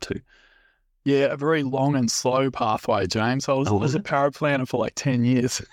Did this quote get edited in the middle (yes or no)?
no